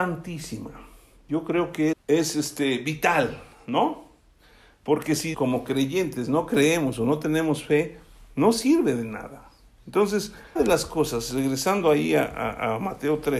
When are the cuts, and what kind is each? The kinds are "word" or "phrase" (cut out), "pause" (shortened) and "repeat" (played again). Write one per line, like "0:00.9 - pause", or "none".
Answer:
0:01.9 - word
0:05.3 - word
0:10.6 - word